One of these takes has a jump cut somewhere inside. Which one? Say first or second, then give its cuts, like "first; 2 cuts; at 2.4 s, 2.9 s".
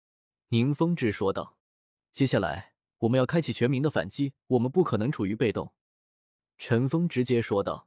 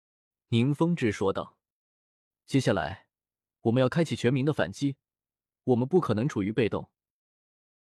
first; 4 cuts; at 1.6 s, 2.8 s, 4.4 s, 5.8 s